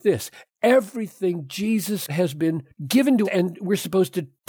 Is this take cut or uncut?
cut